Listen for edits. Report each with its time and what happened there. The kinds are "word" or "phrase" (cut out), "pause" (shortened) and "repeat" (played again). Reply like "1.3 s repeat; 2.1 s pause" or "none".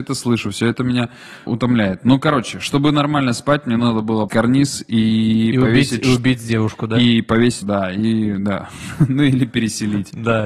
1.5 s word; 4.3 s word; 7.6 s word

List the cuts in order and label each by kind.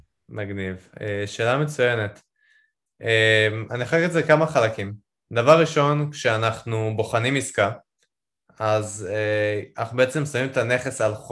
none

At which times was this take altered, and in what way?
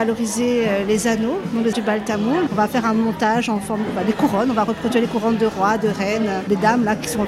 1.7 s word

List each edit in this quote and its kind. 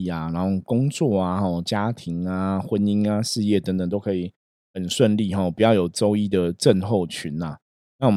none

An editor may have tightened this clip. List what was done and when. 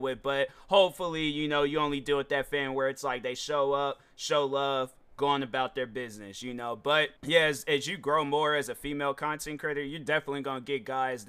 7.2 s pause

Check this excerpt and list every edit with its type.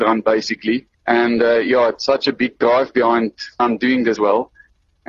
0.9 s pause; 3.6 s word; 4.2 s word

